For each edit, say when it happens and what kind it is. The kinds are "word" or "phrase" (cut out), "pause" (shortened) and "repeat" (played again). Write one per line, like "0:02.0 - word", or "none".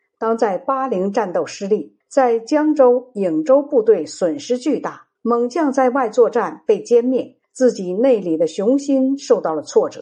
0:02.0 - pause
0:05.2 - pause
0:07.4 - pause